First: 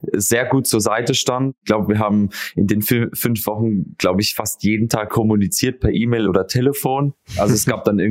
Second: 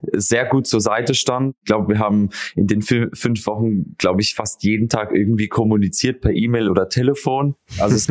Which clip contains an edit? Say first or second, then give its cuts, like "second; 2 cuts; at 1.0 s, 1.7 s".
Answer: first; 1 cut; at 5.1 s